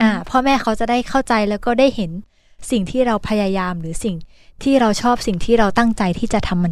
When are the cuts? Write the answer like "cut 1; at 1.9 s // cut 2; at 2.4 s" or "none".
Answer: none